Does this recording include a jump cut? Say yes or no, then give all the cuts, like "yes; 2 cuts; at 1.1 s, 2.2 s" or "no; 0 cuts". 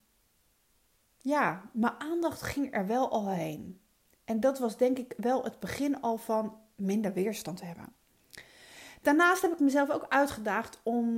no; 0 cuts